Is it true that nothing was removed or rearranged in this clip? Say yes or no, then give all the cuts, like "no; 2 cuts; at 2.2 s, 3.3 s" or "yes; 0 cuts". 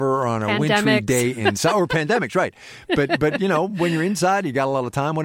yes; 0 cuts